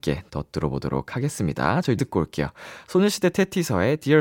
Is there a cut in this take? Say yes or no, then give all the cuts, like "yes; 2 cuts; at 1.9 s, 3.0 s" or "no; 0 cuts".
yes; 1 cut; at 2.0 s